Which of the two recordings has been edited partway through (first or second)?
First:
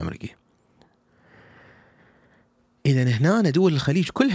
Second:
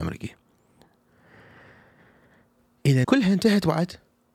second